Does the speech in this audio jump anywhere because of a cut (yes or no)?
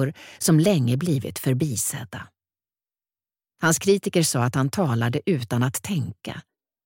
no